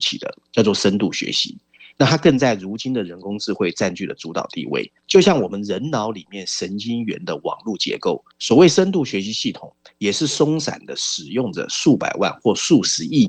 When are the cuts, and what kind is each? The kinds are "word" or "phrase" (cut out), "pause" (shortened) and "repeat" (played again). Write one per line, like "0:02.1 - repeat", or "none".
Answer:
0:05.0 - pause
0:08.3 - pause